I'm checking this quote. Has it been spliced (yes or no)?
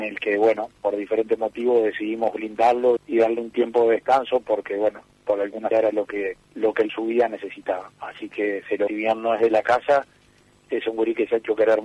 yes